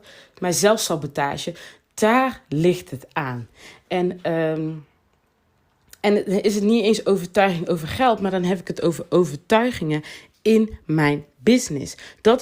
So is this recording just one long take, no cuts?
yes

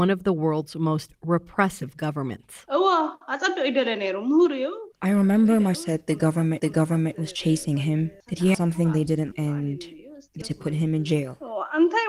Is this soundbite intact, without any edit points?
no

